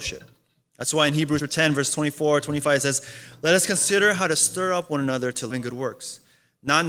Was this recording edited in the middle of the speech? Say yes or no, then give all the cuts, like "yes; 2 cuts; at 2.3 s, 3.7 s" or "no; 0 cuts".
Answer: yes; 2 cuts; at 1.4 s, 5.5 s